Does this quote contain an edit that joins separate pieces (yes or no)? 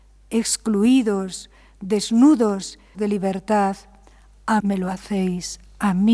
yes